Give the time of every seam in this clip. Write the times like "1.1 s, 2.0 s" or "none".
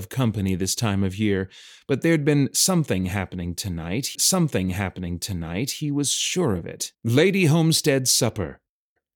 4.1 s, 6.9 s